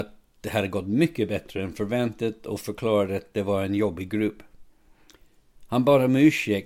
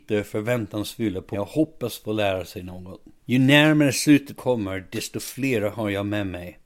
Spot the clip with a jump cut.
second; 3 cuts; at 1.3 s, 3.2 s, 4.4 s

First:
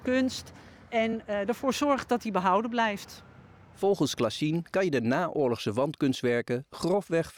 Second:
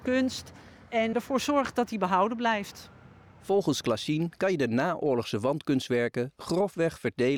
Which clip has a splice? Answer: second; 1 cut; at 1.1 s

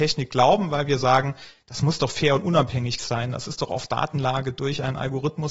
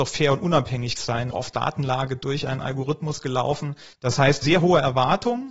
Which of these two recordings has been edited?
second; 3 cuts; at 1.3 s, 3.9 s, 4.4 s

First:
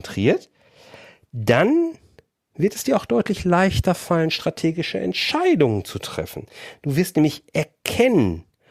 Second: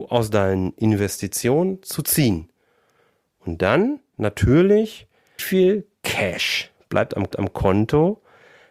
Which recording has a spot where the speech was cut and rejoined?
second; 2 cuts; at 5.4 s, 7.3 s

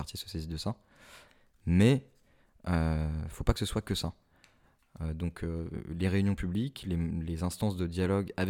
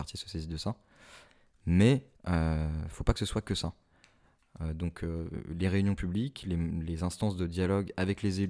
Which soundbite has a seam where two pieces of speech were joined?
second; 1 cut; at 2.1 s

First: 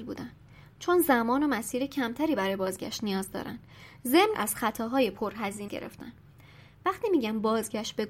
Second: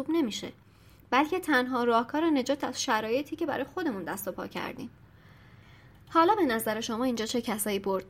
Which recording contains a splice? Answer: first; 2 cuts; at 4.3 s, 5.7 s

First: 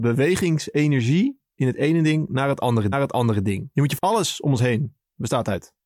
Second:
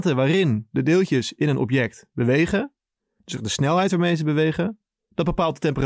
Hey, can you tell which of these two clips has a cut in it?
first; 3 cuts; at 1.6 s, 2.9 s, 4.0 s

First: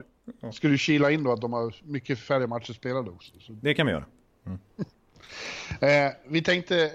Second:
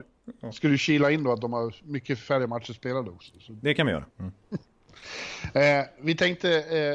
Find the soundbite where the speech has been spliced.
second; 1 cut; at 4.1 s

